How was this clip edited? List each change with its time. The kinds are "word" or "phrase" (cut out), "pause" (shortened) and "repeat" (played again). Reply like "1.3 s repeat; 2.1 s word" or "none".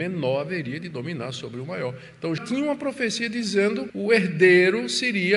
2.4 s word; 3.9 s word